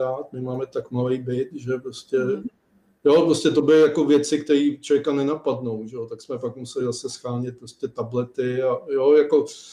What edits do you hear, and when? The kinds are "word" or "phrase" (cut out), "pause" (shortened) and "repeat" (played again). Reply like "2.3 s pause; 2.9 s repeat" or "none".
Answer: none